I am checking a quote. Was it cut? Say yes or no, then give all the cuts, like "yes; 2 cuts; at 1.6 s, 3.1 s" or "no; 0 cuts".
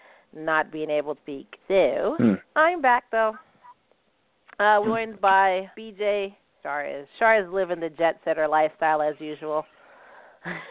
yes; 6 cuts; at 1.2 s, 1.6 s, 2.4 s, 4.8 s, 5.7 s, 6.6 s